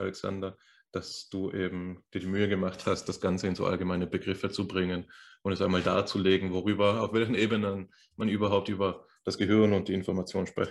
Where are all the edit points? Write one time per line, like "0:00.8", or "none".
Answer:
none